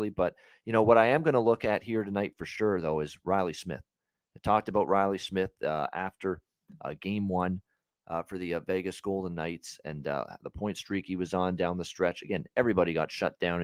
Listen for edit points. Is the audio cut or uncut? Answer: uncut